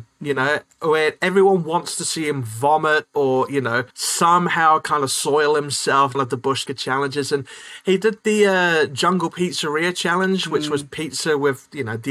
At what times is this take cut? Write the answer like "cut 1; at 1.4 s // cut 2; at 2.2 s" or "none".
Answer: cut 1; at 3.9 s // cut 2; at 6.1 s // cut 3; at 6.7 s